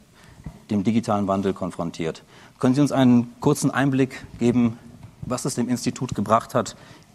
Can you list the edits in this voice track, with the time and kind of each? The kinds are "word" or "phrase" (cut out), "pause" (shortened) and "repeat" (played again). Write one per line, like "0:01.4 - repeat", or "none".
none

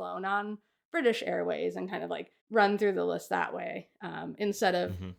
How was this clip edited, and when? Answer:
0:02.4 - pause

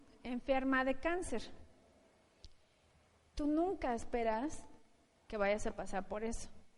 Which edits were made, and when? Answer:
none

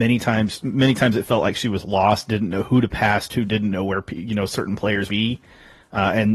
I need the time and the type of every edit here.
0:05.1 - word

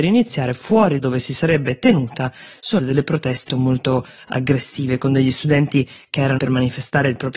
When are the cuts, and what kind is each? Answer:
0:01.0 - word
0:02.8 - word
0:03.5 - word
0:06.4 - word

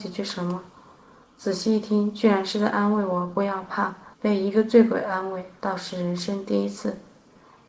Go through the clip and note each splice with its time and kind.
0:04.1 - pause

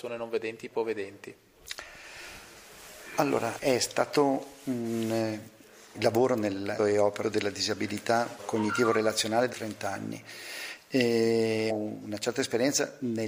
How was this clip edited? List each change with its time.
0:03.6 - word
0:05.9 - word
0:06.8 - word
0:07.2 - word
0:08.4 - word
0:09.5 - word
0:11.7 - word

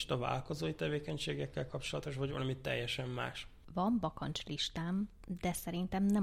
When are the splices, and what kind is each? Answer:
none

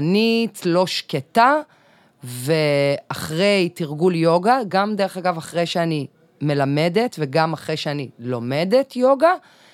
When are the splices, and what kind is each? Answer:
none

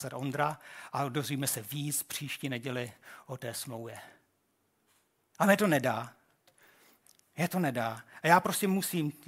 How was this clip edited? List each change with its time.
none

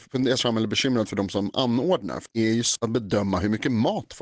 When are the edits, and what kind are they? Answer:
0:02.3 - word
0:02.8 - word

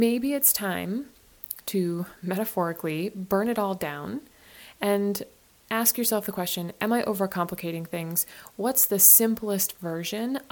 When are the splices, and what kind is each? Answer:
none

